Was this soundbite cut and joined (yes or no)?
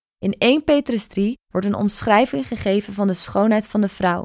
no